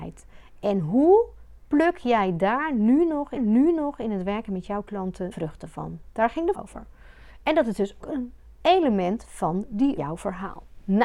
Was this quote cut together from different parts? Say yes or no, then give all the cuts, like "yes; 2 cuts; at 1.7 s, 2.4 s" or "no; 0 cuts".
yes; 6 cuts; at 1.6 s, 3.4 s, 5.3 s, 6.5 s, 8.0 s, 10.0 s